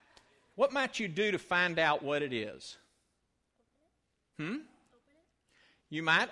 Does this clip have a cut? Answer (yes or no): no